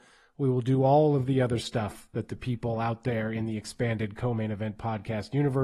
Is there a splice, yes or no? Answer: no